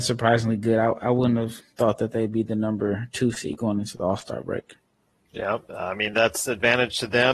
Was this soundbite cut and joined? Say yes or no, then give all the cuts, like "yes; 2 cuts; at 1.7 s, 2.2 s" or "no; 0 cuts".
no; 0 cuts